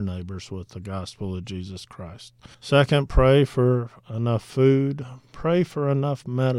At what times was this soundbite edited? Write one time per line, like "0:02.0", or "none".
0:02.5